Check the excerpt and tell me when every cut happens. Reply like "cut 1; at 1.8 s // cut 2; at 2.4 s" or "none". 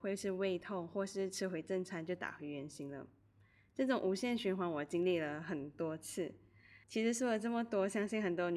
cut 1; at 6.8 s